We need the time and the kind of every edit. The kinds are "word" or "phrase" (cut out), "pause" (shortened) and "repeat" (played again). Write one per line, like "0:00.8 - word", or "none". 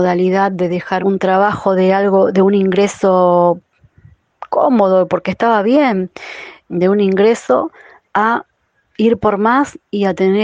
0:01.0 - word
0:06.6 - word